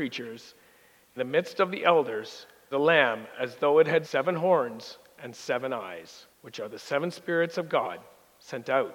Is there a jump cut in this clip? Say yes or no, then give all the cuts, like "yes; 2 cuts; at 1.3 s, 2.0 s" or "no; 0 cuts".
yes; 4 cuts; at 1.2 s, 2.7 s, 4.0 s, 6.3 s